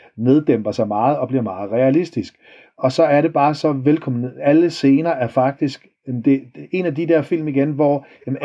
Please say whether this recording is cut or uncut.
uncut